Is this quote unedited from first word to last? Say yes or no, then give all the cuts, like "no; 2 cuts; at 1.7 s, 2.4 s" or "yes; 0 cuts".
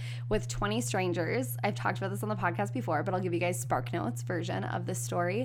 yes; 0 cuts